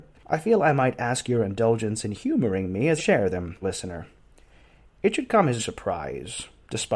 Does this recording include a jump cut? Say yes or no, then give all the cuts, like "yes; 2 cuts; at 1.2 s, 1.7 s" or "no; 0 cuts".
yes; 3 cuts; at 3.0 s, 3.6 s, 5.6 s